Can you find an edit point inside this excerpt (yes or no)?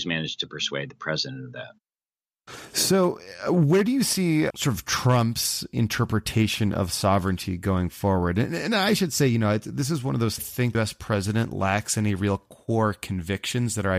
yes